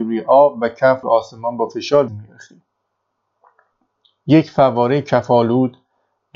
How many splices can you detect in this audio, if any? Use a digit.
2